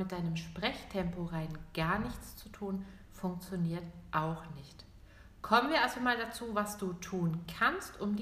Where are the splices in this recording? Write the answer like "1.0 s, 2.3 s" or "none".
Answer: none